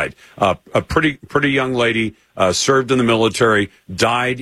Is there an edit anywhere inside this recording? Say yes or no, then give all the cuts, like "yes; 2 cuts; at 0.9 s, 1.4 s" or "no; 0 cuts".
no; 0 cuts